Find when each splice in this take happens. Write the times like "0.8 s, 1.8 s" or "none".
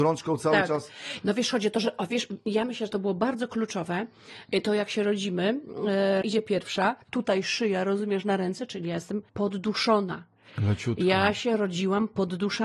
2.9 s, 6.2 s, 7.0 s, 9.3 s